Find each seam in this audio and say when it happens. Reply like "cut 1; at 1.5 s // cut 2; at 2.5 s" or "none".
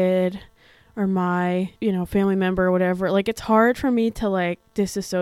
cut 1; at 1.8 s